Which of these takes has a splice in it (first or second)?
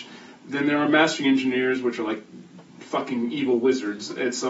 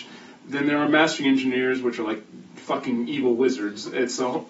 second